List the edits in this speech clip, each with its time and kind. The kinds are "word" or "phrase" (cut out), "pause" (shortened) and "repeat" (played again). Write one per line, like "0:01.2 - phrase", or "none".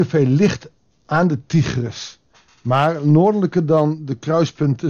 none